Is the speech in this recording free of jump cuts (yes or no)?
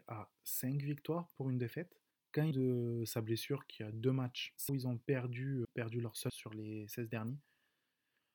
no